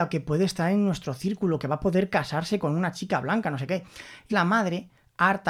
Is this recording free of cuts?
no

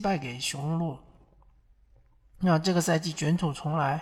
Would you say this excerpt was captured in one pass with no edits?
yes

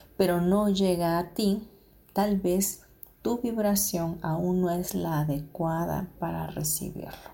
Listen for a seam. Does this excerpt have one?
no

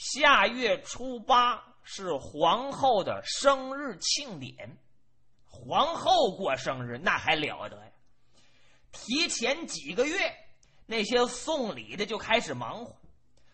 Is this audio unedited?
yes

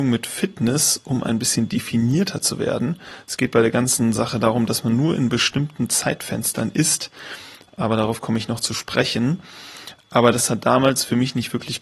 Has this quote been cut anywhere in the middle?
no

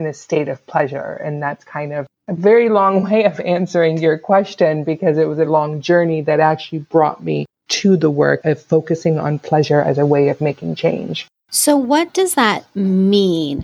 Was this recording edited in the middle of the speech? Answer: yes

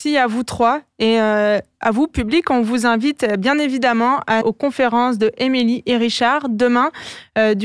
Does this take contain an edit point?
yes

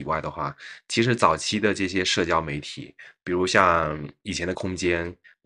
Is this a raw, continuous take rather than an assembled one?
no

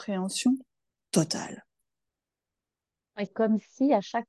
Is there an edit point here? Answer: yes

